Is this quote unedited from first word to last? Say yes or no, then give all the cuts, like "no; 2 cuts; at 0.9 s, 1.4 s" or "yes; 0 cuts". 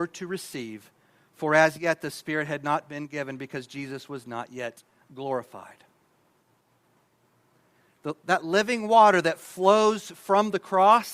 yes; 0 cuts